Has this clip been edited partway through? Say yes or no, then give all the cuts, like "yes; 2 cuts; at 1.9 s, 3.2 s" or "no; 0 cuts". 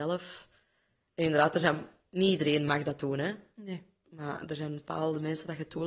no; 0 cuts